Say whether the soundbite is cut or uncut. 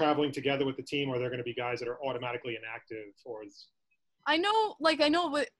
uncut